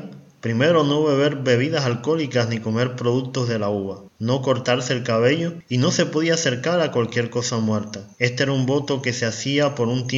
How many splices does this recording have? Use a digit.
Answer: 2